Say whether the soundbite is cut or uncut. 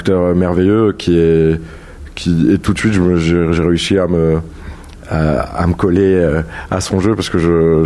uncut